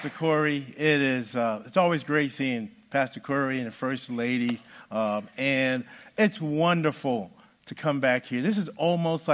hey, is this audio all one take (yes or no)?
yes